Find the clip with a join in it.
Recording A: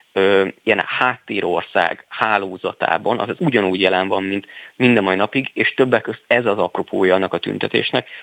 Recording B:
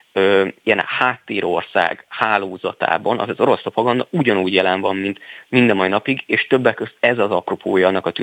A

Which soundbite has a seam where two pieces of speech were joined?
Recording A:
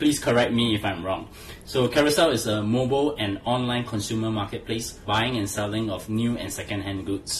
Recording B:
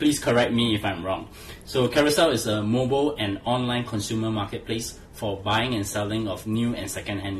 A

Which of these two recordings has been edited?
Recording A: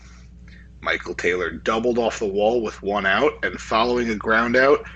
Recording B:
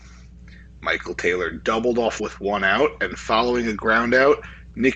B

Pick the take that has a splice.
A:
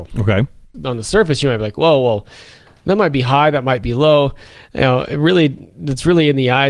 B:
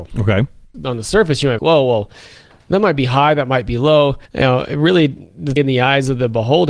B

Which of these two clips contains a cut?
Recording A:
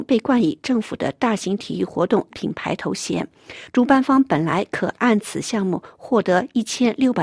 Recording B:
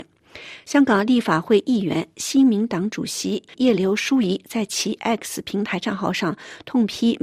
A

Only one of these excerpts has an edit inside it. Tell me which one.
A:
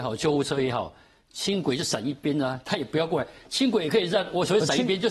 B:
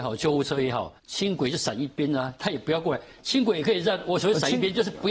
B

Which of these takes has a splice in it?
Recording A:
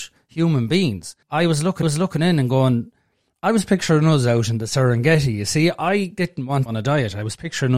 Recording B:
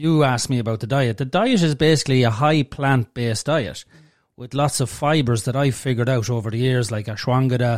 A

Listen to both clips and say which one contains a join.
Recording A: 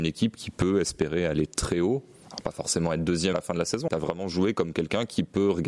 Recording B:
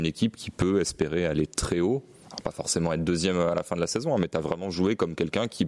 A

